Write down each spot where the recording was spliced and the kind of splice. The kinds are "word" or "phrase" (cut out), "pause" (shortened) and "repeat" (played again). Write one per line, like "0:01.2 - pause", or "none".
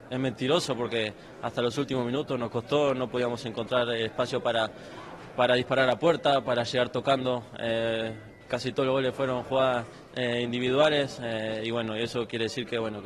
none